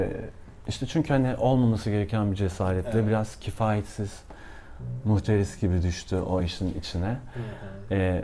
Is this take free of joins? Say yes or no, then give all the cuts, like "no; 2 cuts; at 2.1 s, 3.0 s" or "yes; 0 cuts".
yes; 0 cuts